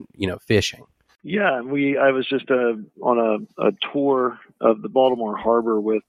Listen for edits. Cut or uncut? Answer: uncut